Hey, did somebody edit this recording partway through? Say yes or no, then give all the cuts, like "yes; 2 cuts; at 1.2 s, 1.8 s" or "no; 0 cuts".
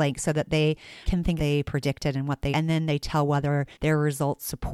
yes; 4 cuts; at 1.0 s, 1.4 s, 2.5 s, 3.7 s